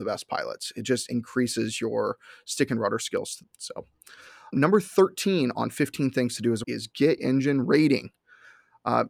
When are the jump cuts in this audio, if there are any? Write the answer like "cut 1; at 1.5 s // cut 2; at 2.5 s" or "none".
cut 1; at 3.4 s // cut 2; at 4.5 s // cut 3; at 6.6 s // cut 4; at 7.2 s